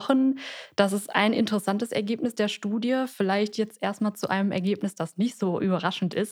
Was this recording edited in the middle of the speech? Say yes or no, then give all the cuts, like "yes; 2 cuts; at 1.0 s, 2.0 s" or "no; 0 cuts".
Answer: no; 0 cuts